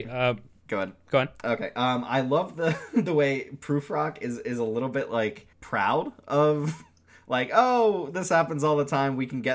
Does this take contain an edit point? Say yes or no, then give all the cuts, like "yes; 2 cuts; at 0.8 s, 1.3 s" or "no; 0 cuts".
yes; 1 cut; at 5.5 s